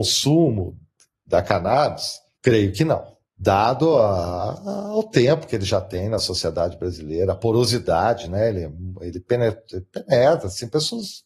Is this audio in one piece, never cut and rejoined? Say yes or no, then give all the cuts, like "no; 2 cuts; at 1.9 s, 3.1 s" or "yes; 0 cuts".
yes; 0 cuts